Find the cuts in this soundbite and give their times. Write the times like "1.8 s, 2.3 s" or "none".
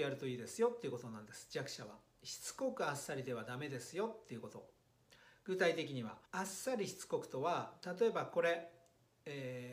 6.3 s